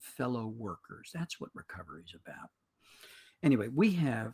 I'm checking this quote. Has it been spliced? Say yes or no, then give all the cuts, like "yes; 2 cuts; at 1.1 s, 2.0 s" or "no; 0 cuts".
no; 0 cuts